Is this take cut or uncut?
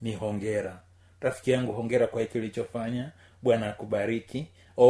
uncut